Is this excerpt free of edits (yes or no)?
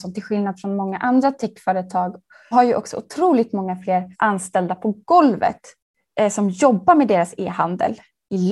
no